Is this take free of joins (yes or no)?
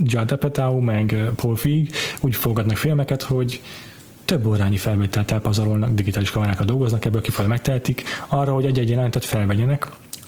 yes